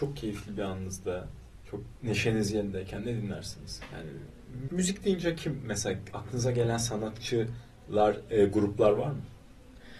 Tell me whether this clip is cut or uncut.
cut